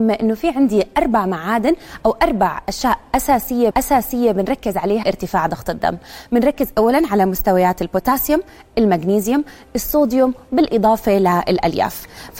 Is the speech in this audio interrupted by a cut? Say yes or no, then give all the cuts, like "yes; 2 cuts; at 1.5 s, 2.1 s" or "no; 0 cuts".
yes; 2 cuts; at 3.7 s, 5.0 s